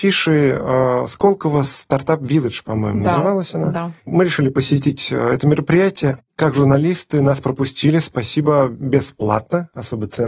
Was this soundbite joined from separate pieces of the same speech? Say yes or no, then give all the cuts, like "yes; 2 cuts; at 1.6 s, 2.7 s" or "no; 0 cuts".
yes; 1 cut; at 4.0 s